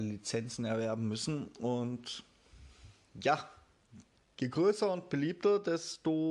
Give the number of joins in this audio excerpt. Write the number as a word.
zero